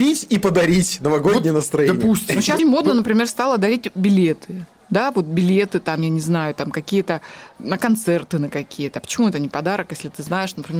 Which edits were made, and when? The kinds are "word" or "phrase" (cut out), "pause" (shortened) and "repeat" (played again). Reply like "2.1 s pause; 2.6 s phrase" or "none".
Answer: 2.6 s word; 7.6 s word